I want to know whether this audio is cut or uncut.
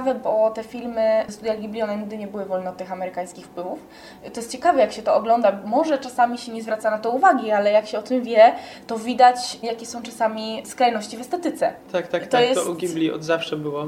uncut